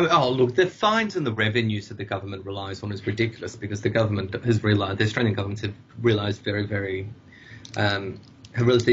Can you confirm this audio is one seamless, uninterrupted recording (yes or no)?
yes